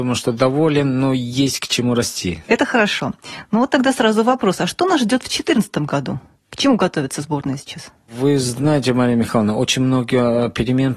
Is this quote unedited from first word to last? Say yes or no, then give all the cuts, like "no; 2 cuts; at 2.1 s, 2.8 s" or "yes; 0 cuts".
yes; 0 cuts